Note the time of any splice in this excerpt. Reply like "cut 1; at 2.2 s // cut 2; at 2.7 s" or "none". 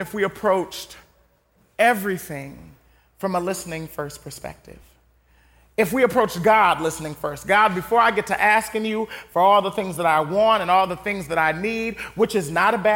none